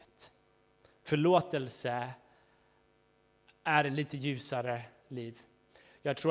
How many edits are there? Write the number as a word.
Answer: zero